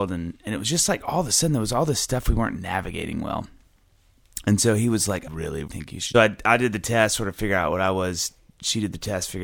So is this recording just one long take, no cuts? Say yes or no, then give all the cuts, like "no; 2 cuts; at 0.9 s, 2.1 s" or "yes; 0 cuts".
no; 3 cuts; at 5.3 s, 5.7 s, 6.1 s